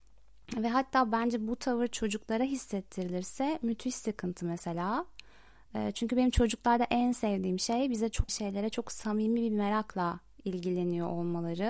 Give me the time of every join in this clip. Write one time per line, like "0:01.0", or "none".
0:08.3